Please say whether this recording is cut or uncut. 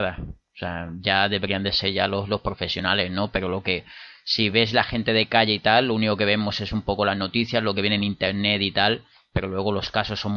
uncut